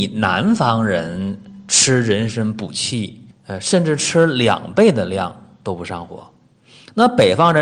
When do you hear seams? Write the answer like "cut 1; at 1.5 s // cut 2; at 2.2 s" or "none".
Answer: cut 1; at 3.3 s